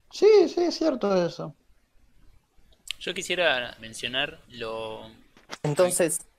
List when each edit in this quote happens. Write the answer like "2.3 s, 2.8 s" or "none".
3.8 s, 4.4 s